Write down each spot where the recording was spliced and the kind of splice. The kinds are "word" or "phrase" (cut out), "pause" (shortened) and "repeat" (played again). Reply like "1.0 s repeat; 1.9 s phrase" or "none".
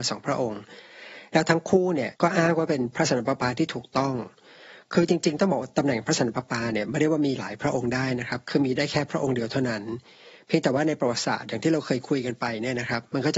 2.2 s pause